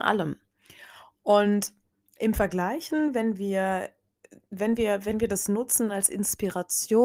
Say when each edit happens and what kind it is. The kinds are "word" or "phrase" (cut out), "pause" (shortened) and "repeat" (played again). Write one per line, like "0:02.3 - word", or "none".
0:02.0 - pause